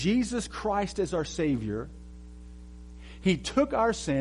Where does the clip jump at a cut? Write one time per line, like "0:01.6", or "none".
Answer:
none